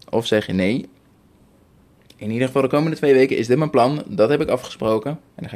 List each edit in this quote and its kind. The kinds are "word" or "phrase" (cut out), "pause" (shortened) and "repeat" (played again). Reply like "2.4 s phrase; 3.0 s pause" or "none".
none